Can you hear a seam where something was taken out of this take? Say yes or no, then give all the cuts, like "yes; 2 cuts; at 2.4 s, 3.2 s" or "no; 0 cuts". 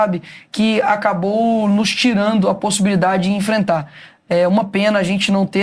no; 0 cuts